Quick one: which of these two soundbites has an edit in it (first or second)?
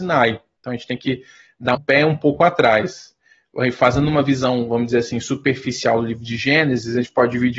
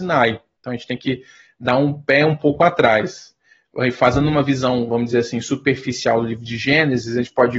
first